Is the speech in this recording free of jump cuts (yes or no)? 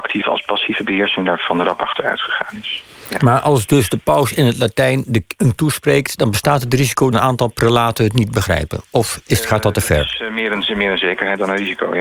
no